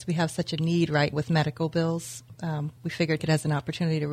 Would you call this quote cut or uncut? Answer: cut